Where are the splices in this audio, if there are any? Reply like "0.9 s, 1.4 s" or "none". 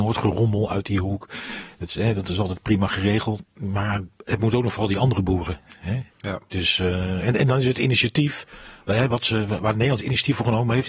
6.1 s